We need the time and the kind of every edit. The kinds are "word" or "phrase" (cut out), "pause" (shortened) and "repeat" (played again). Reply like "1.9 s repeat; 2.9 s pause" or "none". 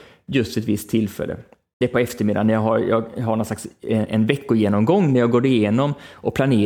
none